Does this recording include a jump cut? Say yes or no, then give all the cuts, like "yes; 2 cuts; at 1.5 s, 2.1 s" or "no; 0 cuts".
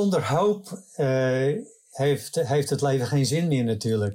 no; 0 cuts